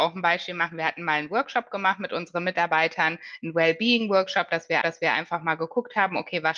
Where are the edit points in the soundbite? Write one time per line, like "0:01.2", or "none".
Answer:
0:04.8